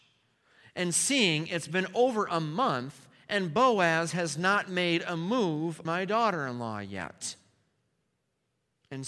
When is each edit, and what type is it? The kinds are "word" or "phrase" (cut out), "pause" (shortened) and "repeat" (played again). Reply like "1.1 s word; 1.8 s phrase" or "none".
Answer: 5.8 s word